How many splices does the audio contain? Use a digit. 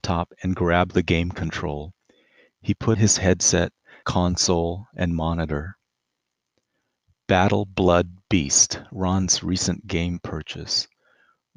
2